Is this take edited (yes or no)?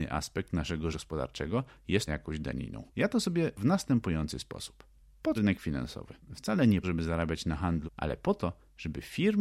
yes